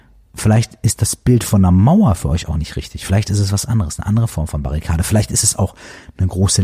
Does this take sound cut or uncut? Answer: uncut